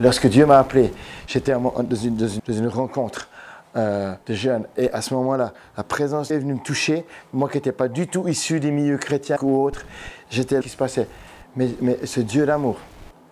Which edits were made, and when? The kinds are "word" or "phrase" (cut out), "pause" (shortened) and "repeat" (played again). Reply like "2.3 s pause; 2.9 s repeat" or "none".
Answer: 2.4 s word; 4.2 s pause; 6.3 s word; 9.4 s word; 10.6 s phrase

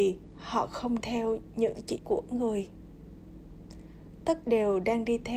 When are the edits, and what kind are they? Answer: 1.0 s word; 2.0 s word; 4.4 s word

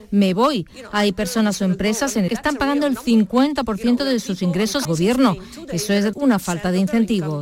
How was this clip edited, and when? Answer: 2.3 s word; 4.8 s word; 6.1 s word

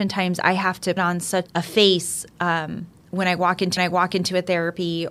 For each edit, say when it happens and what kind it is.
1.0 s word; 1.5 s word; 3.8 s repeat

